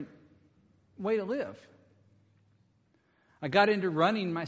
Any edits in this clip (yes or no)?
no